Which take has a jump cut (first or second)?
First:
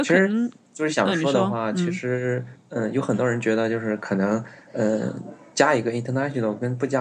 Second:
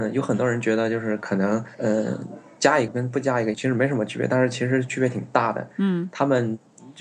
second